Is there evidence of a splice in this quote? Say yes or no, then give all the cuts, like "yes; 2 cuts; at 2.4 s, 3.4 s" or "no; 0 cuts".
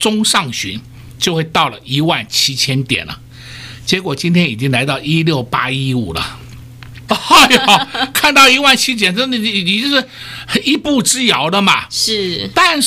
yes; 1 cut; at 7.1 s